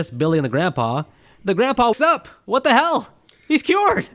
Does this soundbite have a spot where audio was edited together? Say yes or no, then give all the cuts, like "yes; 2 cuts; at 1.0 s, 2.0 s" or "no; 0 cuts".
yes; 1 cut; at 1.9 s